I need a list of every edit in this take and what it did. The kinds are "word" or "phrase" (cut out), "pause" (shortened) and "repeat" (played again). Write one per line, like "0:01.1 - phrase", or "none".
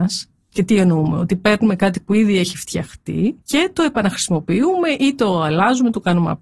0:03.4 - pause